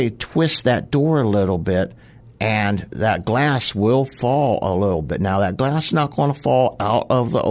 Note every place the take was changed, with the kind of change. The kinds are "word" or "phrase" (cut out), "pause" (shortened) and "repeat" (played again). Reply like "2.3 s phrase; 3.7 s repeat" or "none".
none